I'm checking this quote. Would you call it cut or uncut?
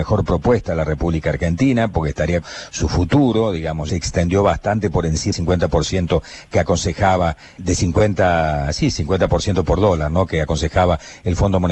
cut